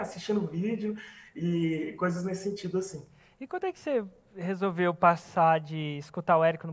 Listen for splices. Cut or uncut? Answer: uncut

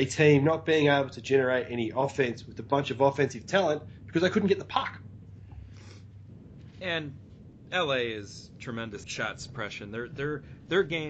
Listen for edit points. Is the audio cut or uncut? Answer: cut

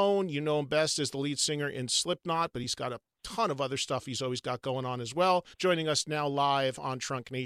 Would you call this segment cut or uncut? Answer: cut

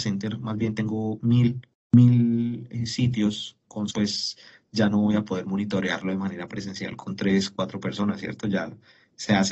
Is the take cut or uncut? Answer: cut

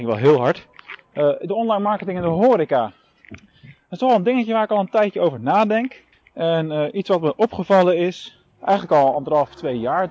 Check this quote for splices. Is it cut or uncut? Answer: cut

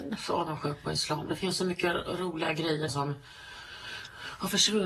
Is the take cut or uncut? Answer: cut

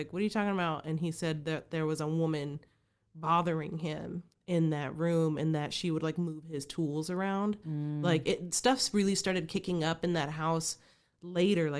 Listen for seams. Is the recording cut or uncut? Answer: uncut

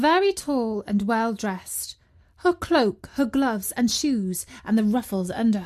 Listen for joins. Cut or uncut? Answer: uncut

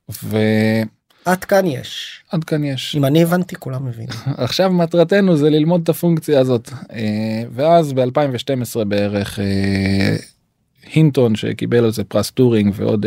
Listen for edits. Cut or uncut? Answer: uncut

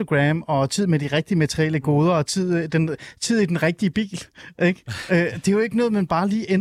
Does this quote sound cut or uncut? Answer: uncut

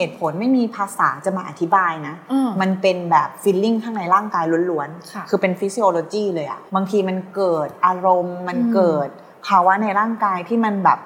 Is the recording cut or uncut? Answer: cut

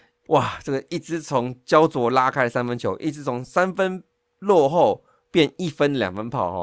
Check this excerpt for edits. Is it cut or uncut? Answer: uncut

